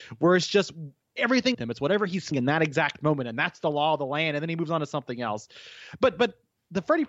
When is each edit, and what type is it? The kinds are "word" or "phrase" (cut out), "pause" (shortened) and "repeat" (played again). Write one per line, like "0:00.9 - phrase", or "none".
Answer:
0:01.5 - phrase
0:02.3 - word